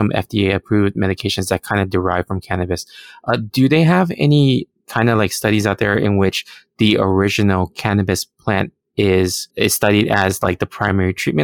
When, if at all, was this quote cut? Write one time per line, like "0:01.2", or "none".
0:09.5